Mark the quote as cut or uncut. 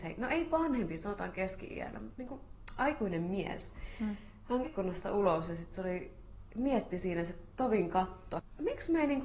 cut